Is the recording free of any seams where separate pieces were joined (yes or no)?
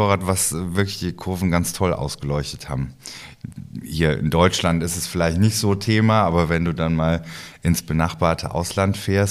yes